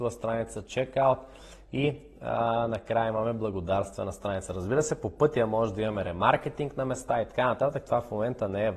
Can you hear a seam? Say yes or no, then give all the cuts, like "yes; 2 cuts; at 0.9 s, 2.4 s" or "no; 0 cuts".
no; 0 cuts